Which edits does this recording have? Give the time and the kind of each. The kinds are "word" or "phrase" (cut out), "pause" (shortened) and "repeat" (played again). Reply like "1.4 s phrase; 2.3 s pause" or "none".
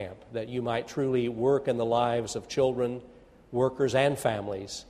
none